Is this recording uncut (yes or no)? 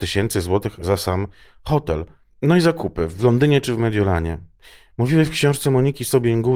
yes